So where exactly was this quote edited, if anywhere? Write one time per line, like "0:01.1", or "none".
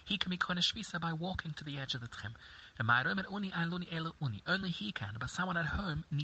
none